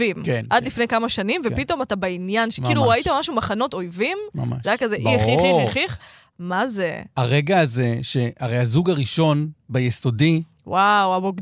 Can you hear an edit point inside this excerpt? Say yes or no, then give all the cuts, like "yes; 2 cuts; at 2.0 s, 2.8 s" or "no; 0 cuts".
no; 0 cuts